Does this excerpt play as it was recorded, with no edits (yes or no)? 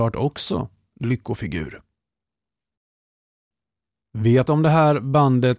no